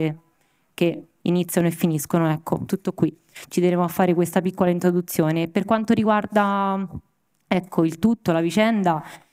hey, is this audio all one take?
yes; 0 cuts

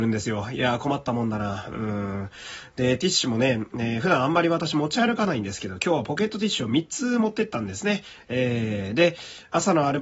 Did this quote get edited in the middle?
no; 0 cuts

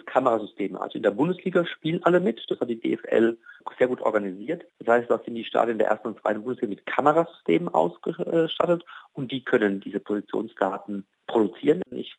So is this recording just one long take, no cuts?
no; 2 cuts; at 4.7 s, 11.1 s

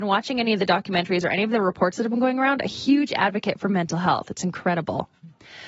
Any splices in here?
no; 0 cuts

